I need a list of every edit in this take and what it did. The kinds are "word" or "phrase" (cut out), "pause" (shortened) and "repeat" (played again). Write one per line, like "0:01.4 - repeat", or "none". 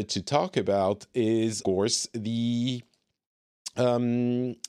0:01.6 - word